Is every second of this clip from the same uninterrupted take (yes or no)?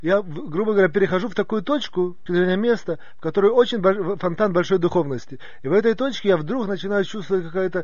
no